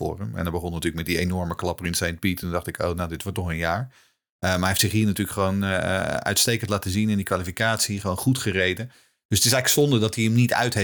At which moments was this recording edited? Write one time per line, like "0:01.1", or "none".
none